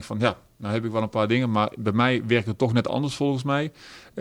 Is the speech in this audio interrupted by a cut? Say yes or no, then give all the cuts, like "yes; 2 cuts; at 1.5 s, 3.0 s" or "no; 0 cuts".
no; 0 cuts